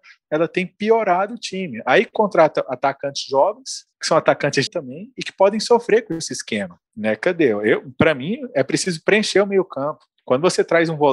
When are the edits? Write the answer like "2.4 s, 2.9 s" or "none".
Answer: 3.9 s, 4.7 s, 6.9 s, 10.1 s